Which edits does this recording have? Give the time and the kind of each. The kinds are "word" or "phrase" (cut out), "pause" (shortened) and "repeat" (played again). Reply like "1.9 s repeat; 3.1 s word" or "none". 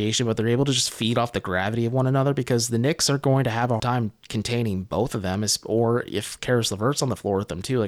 3.8 s word